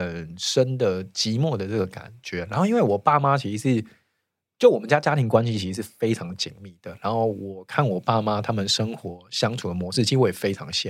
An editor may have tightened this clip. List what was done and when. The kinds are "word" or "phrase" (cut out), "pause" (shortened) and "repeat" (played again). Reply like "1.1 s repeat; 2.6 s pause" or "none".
none

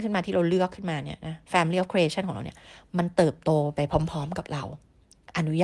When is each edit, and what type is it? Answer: none

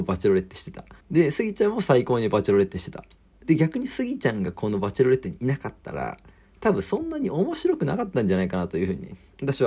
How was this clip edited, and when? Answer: 1.0 s pause

